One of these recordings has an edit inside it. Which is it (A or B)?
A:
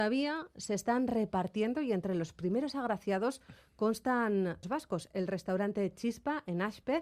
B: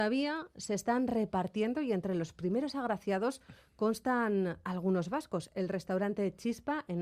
A